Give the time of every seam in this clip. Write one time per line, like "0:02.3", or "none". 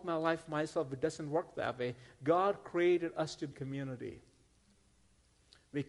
0:03.5